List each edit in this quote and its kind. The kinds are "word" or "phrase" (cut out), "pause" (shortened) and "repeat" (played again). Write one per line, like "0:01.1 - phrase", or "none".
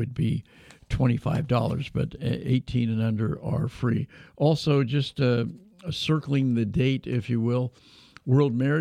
none

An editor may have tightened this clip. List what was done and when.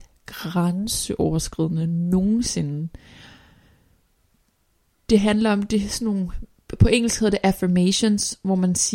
none

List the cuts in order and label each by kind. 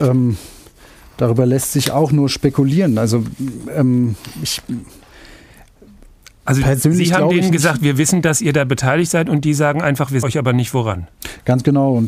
0:10.2 - word

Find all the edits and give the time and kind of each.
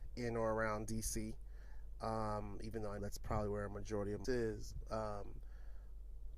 0:03.0 - word
0:04.2 - word

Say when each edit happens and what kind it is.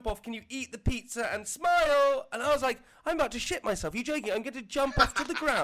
none

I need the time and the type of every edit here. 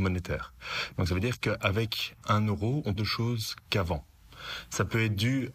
0:02.2 - word
0:03.0 - phrase

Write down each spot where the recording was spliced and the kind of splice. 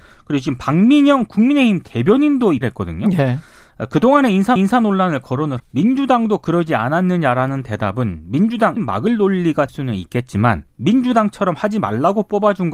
0:02.6 - word
0:04.6 - repeat
0:05.6 - word
0:08.8 - word
0:09.7 - word
0:10.7 - pause

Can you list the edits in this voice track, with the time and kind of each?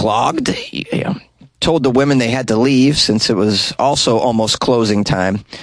none

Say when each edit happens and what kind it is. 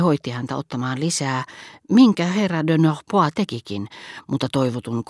none

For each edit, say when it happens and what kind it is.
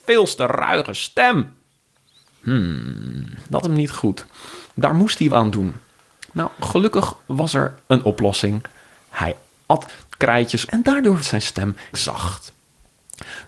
0:03.6 - word
0:05.3 - word
0:07.2 - pause
0:07.8 - pause
0:10.2 - phrase
0:10.7 - word
0:11.2 - word
0:11.9 - word

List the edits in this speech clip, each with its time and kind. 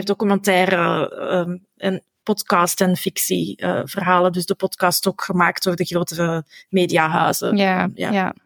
none

